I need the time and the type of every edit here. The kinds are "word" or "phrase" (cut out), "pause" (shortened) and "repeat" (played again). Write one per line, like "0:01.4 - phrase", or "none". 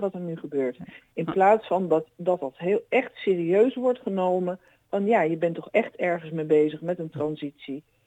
none